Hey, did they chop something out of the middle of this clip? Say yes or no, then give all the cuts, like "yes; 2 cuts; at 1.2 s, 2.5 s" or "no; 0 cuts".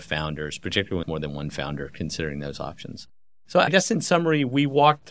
yes; 1 cut; at 1.0 s